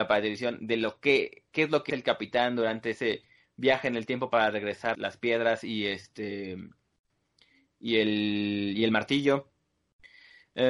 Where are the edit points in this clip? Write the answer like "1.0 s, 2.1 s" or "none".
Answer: 1.9 s, 4.9 s